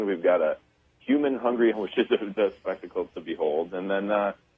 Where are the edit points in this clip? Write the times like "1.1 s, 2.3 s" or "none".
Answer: 1.7 s, 2.4 s